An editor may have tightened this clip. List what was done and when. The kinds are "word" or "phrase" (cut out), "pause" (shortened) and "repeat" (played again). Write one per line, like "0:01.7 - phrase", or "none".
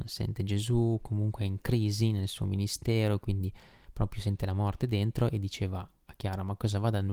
none